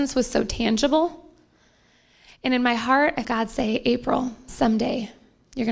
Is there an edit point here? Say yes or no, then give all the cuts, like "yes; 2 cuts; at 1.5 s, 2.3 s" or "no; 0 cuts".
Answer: yes; 1 cut; at 3.2 s